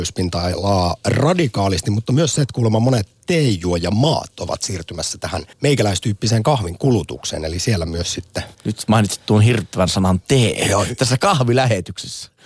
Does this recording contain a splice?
yes; 2 cuts; at 5.5 s, 8.5 s

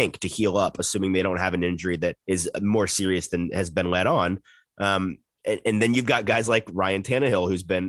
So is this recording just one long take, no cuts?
no; 1 cut; at 2.2 s

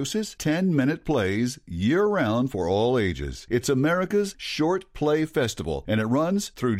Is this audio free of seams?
yes; 0 cuts

